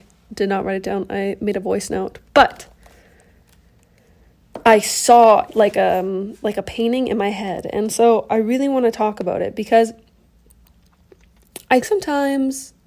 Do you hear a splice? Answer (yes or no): yes